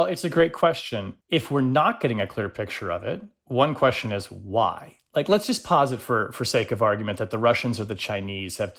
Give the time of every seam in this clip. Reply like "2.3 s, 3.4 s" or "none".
1.2 s